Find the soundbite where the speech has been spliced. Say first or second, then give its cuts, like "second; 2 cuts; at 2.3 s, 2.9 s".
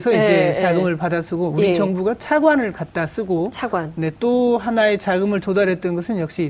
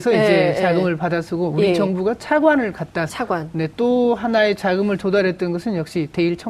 second; 1 cut; at 3.1 s